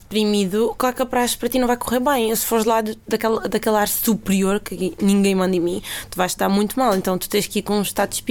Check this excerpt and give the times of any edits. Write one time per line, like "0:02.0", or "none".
none